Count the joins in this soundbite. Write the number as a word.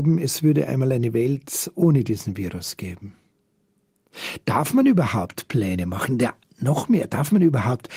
zero